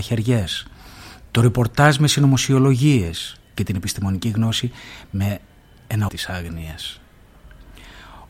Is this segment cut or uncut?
cut